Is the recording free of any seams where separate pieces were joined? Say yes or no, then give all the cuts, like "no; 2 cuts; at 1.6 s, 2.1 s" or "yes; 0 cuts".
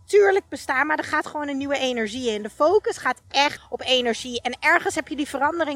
no; 1 cut; at 3.6 s